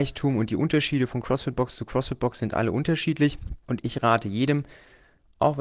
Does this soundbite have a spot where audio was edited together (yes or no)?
yes